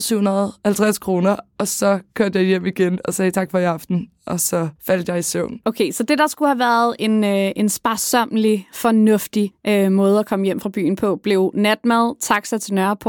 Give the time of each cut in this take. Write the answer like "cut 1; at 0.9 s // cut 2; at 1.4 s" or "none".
cut 1; at 4.8 s